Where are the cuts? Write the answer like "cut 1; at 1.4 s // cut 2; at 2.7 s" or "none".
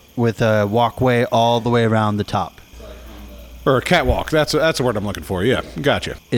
none